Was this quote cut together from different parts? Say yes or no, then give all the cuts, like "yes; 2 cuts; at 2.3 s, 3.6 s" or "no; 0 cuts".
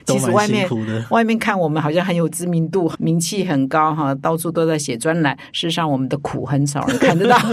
yes; 1 cut; at 2.9 s